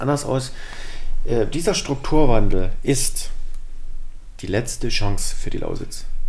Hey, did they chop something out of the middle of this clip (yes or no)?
no